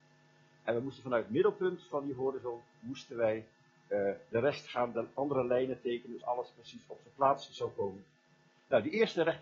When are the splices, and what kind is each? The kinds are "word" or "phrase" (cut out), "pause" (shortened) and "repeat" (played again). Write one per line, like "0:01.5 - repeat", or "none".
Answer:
0:06.2 - word